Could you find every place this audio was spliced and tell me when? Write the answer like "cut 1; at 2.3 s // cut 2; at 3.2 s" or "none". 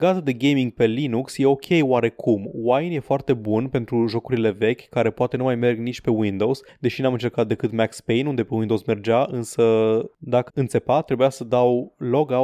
cut 1; at 10.5 s